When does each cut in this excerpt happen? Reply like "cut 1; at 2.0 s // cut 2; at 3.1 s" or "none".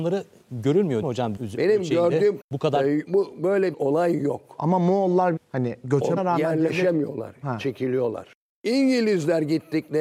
cut 1; at 1.0 s // cut 2; at 1.4 s // cut 3; at 2.4 s // cut 4; at 3.1 s // cut 5; at 3.7 s // cut 6; at 5.4 s // cut 7; at 6.2 s